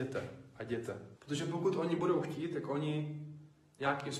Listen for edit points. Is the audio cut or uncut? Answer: cut